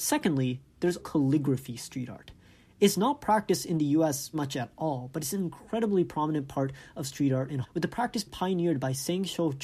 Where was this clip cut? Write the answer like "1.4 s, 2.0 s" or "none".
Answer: 1.0 s, 4.3 s, 7.6 s, 8.3 s